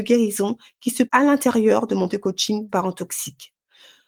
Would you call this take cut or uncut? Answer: cut